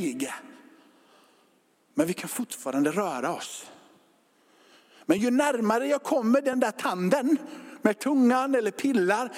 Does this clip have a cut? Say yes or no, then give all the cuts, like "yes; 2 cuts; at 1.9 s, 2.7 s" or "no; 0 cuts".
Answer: no; 0 cuts